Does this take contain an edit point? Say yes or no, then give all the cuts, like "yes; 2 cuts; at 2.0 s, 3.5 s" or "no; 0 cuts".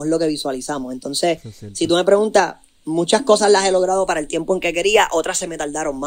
no; 0 cuts